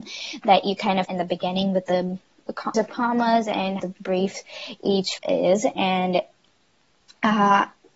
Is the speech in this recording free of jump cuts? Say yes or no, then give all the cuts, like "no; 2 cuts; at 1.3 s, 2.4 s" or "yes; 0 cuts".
no; 4 cuts; at 1.0 s, 2.7 s, 3.8 s, 5.2 s